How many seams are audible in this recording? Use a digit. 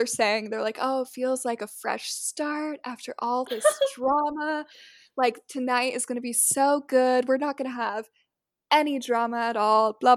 0